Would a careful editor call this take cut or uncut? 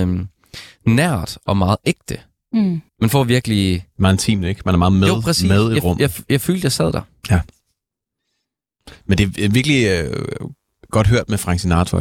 cut